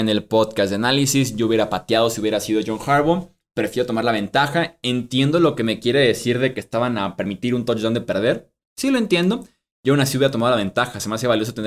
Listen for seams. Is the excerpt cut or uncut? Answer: uncut